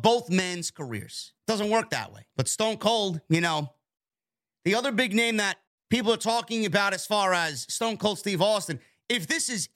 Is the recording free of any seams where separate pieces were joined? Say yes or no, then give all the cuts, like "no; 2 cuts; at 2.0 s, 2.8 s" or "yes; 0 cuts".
no; 3 cuts; at 1.4 s, 2.3 s, 5.7 s